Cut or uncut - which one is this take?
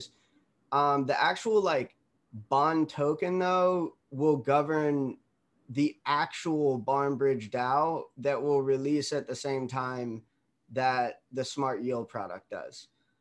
uncut